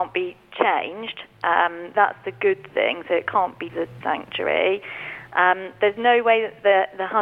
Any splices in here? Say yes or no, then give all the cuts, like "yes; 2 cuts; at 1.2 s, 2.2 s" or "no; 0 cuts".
yes; 3 cuts; at 1.9 s, 3.7 s, 4.0 s